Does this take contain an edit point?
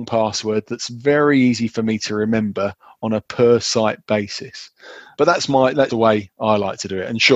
yes; 2 cuts; at 5.1 s, 5.9 s

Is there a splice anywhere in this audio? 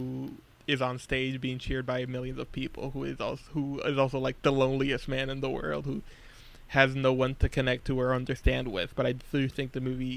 no; 0 cuts

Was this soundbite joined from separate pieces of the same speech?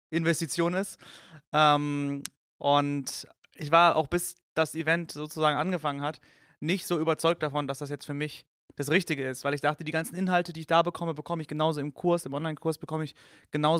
no; 0 cuts

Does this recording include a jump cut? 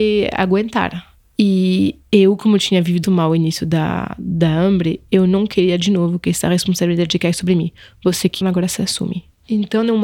yes; 2 cuts; at 3.0 s, 8.4 s

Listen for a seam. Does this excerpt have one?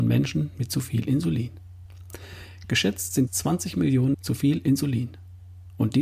yes; 2 cuts; at 3.3 s, 4.1 s

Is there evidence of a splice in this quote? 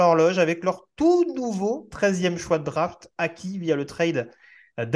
no; 0 cuts

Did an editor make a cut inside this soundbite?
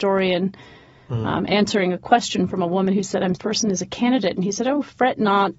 yes; 1 cut; at 3.3 s

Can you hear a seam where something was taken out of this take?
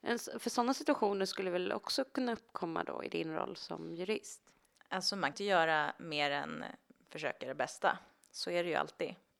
yes; 1 cut; at 5.3 s

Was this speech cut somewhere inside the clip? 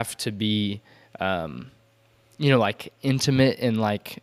no; 0 cuts

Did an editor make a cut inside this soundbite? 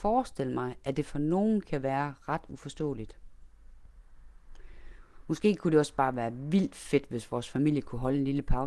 no; 0 cuts

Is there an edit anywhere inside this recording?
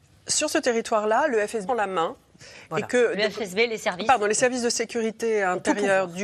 yes; 1 cut; at 1.7 s

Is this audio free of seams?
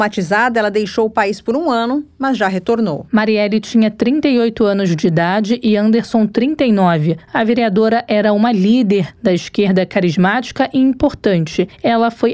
yes; 0 cuts

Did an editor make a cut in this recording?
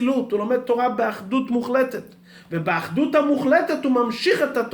no; 0 cuts

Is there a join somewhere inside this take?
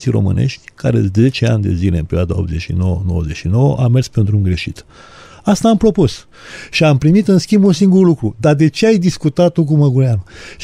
no; 0 cuts

